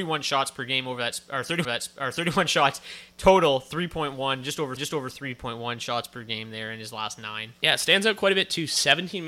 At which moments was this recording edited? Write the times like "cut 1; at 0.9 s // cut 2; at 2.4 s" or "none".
cut 1; at 1.6 s // cut 2; at 4.8 s